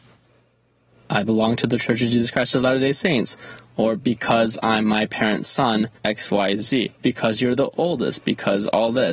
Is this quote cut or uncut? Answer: cut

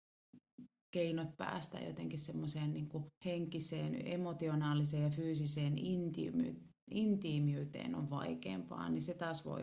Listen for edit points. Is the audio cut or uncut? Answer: cut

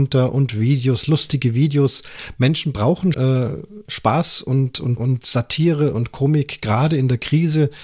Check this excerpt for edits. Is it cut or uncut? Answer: cut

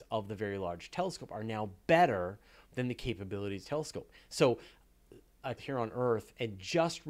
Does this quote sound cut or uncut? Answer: cut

